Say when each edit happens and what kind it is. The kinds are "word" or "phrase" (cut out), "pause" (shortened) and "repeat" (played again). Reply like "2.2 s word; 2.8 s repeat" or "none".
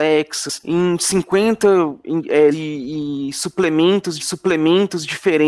2.5 s word; 4.2 s repeat